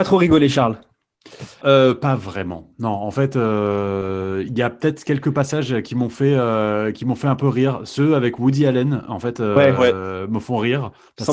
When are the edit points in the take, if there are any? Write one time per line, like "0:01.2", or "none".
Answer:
0:01.6

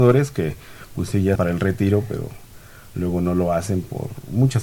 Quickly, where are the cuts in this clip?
0:01.4

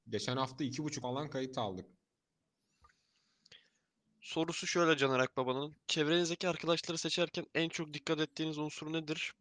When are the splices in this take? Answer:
0:01.0

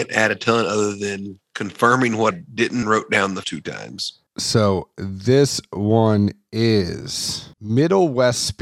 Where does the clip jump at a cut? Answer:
0:02.3
0:02.8
0:03.4
0:07.5

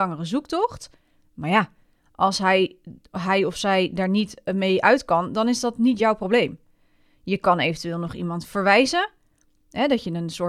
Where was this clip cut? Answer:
none

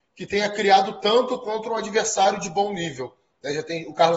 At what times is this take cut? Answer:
none

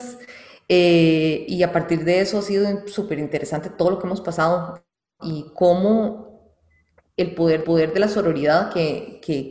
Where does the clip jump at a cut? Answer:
0:07.6

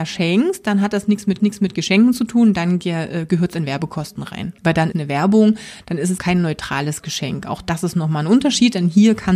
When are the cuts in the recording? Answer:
0:01.4
0:04.6
0:04.9
0:06.2

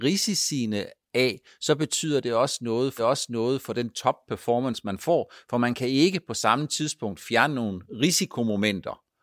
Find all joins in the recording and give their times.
0:03.0

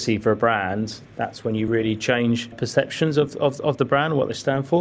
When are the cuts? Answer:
none

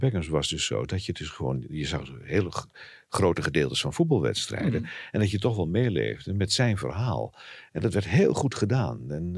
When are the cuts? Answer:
none

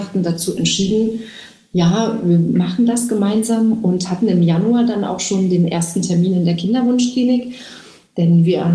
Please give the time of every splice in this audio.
none

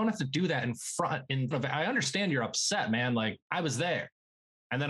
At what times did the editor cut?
0:01.5

